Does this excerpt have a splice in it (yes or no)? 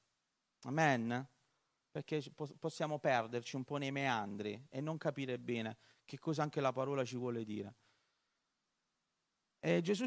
no